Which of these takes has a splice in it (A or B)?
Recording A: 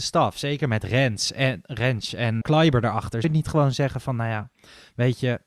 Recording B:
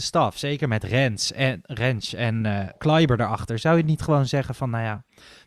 A